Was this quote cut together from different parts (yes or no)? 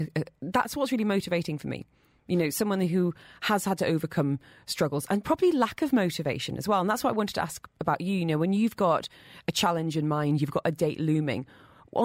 no